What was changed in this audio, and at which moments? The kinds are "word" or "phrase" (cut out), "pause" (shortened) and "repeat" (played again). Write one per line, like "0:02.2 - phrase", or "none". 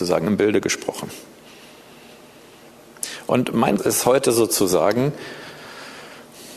0:03.8 - word